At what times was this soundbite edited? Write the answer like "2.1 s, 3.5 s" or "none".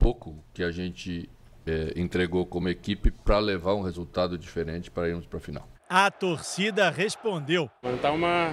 none